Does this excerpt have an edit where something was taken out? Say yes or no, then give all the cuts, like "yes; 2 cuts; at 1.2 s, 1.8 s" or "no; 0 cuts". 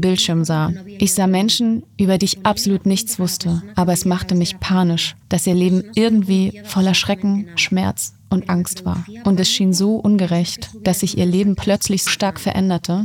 yes; 1 cut; at 12.1 s